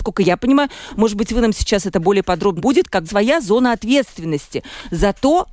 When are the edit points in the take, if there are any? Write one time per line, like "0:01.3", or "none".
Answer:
0:02.6
0:03.0